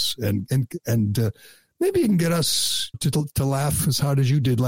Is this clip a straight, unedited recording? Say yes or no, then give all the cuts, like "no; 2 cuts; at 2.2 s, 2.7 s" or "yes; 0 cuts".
no; 1 cut; at 2.9 s